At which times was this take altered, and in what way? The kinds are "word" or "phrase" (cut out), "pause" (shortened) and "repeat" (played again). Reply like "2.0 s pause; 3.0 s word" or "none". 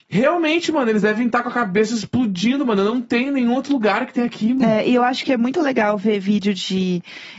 none